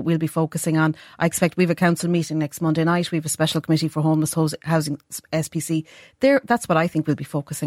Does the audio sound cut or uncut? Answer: uncut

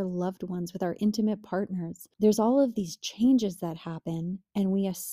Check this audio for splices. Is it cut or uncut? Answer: cut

